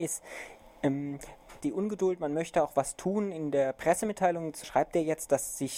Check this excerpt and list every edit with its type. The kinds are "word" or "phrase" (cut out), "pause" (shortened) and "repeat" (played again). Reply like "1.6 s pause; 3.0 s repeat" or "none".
1.6 s phrase; 4.6 s word